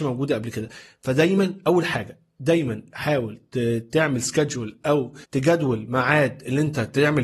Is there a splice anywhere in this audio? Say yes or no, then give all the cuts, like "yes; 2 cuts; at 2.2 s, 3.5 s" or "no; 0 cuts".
yes; 1 cut; at 5.2 s